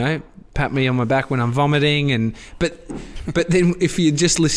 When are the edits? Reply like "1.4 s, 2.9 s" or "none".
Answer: none